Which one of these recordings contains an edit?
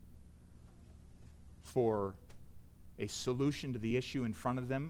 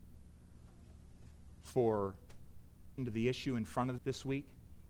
second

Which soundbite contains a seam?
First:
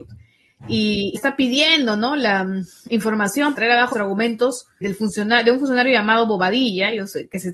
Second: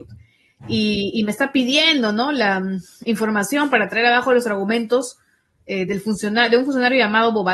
first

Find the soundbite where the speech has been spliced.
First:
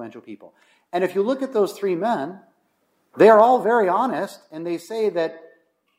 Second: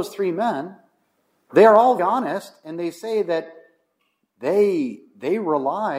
second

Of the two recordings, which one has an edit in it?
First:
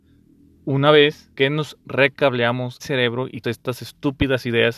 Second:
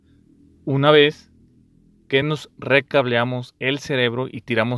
first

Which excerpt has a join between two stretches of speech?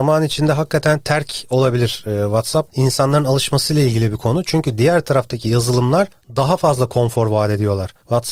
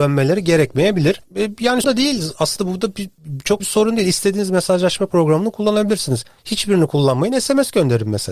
second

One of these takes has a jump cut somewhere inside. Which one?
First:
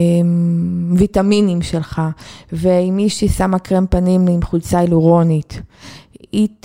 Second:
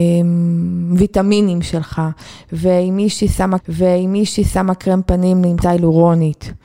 second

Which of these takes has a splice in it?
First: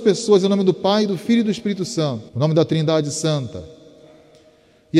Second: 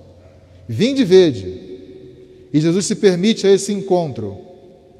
first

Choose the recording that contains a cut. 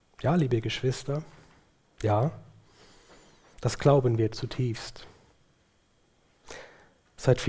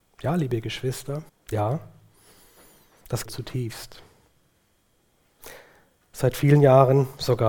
second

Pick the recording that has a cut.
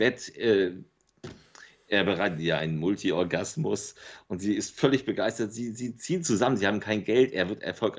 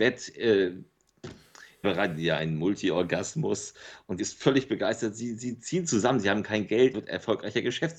second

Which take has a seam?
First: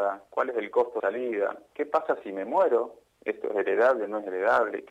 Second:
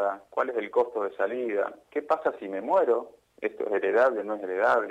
first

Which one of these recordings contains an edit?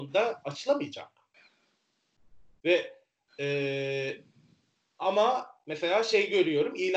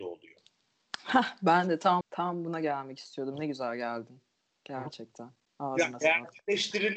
second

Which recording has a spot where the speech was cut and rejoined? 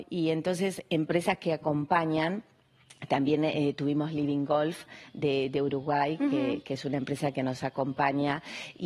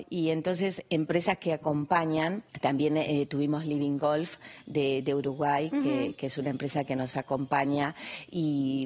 second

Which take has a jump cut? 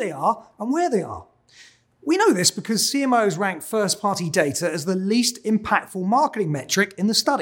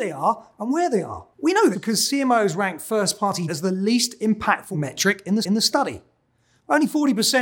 second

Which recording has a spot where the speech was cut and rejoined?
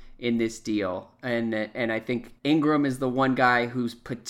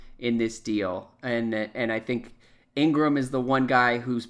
first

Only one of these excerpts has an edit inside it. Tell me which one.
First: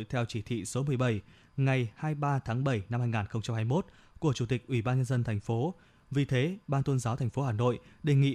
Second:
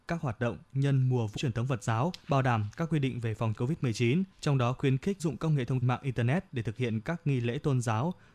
second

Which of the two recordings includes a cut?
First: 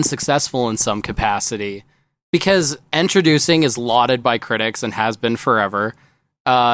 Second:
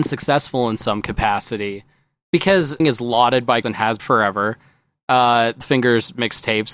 second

